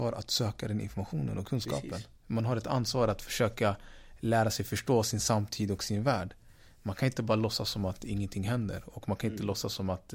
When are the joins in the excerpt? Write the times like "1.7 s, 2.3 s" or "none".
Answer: none